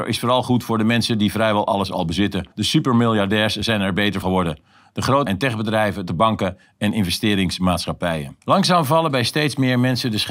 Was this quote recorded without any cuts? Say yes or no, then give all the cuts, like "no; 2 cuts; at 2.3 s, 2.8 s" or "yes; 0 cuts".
no; 5 cuts; at 2.5 s, 4.2 s, 5.3 s, 6.1 s, 8.4 s